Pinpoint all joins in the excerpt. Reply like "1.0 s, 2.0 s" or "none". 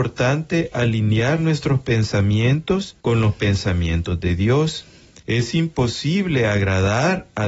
3.0 s, 5.2 s